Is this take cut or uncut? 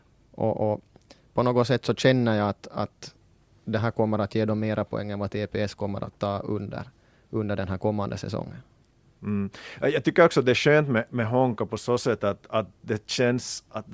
uncut